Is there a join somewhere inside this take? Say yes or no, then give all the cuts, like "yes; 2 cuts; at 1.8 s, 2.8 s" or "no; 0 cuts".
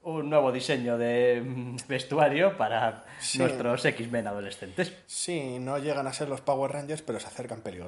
no; 0 cuts